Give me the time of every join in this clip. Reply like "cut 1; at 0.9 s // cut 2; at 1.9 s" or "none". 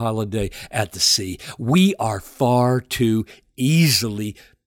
none